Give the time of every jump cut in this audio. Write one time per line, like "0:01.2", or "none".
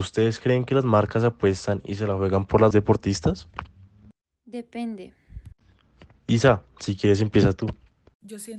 0:02.7
0:06.2